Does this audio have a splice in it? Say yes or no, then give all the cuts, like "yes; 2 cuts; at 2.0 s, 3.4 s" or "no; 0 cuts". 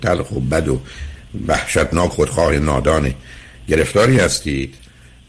yes; 1 cut; at 2.1 s